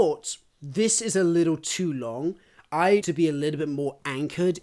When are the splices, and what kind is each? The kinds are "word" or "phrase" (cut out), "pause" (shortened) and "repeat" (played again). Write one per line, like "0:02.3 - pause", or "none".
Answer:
0:03.0 - word